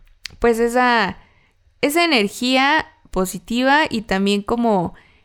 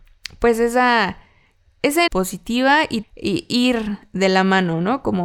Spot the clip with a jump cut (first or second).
second